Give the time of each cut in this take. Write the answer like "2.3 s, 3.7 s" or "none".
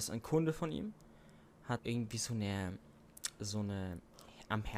1.8 s